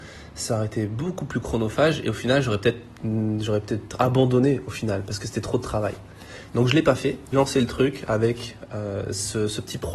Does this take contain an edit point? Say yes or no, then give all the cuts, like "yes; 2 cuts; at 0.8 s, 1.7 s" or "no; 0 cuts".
yes; 1 cut; at 7.3 s